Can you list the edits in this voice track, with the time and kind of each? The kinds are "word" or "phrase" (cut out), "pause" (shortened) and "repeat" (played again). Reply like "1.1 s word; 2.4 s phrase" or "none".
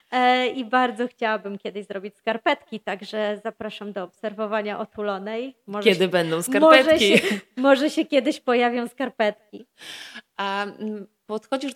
none